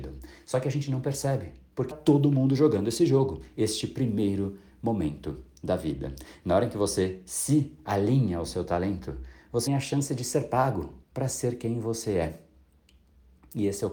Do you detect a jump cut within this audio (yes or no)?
yes